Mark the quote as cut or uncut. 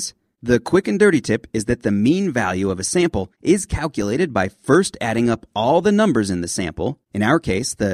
uncut